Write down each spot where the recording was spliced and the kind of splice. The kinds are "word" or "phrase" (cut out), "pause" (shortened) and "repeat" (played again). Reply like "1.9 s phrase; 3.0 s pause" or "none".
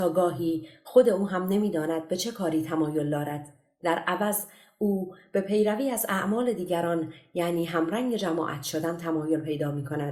none